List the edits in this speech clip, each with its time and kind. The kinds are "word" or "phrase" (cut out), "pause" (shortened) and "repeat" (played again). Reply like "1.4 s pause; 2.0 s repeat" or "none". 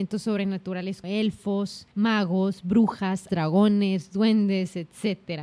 1.0 s word; 1.9 s pause; 3.3 s word